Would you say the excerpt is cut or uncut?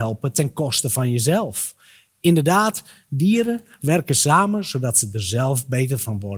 uncut